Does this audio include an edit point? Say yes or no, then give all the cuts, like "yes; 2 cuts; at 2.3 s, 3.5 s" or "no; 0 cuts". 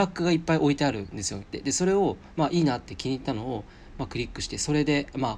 yes; 1 cut; at 1.4 s